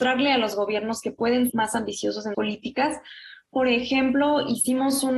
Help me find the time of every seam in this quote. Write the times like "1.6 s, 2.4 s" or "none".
1.5 s, 2.3 s